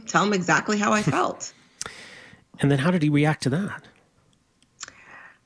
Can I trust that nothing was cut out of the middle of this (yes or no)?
yes